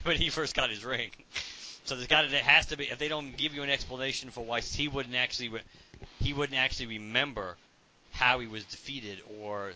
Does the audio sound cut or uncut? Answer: uncut